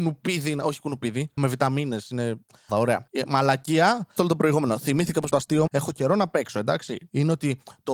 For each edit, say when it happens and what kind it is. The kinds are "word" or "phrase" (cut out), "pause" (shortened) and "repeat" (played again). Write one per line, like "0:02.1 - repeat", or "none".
0:01.4 - word
0:02.7 - word
0:04.2 - word
0:05.3 - word
0:05.7 - word